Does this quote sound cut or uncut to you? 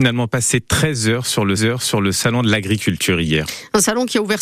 cut